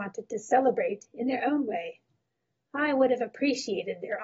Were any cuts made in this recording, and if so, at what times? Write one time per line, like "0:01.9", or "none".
none